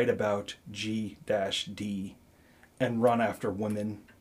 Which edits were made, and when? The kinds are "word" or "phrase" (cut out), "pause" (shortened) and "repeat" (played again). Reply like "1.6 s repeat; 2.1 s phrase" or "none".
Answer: none